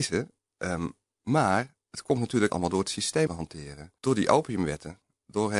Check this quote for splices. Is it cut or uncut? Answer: cut